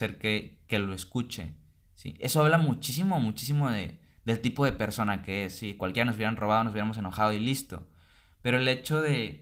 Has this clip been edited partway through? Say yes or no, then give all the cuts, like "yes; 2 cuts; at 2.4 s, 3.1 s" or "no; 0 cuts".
no; 0 cuts